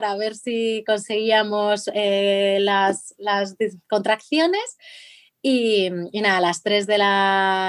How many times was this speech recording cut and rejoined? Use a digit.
1